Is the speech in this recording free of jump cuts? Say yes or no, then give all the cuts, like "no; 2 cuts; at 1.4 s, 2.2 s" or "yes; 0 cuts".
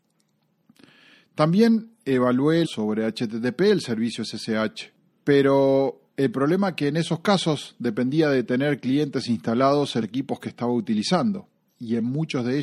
no; 3 cuts; at 2.6 s, 6.1 s, 10.0 s